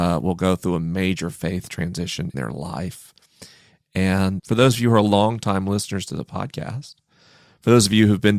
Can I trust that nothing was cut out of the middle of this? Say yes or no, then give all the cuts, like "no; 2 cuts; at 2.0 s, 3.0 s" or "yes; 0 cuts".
no; 2 cuts; at 2.3 s, 4.4 s